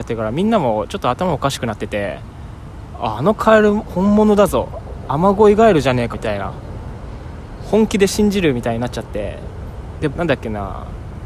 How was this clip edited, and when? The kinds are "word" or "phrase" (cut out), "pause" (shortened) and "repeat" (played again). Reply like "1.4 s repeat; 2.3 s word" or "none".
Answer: 6.1 s phrase; 10.1 s phrase